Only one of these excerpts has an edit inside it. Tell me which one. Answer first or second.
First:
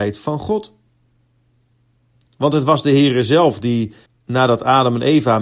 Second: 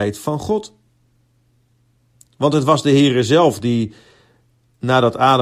first